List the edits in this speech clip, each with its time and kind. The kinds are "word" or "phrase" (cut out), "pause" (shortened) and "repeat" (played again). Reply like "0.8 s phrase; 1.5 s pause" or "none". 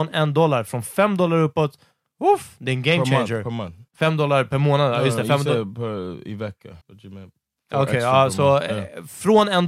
3.9 s pause; 6.8 s pause